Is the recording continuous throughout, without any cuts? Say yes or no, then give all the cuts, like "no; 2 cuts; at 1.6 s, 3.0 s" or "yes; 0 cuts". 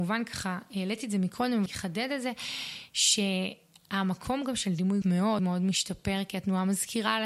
no; 3 cuts; at 1.7 s, 5.0 s, 5.4 s